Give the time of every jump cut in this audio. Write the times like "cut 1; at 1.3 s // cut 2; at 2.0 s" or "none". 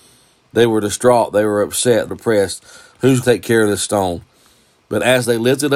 cut 1; at 2.1 s // cut 2; at 3.2 s